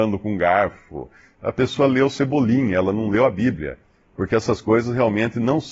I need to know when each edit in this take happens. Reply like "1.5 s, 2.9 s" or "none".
none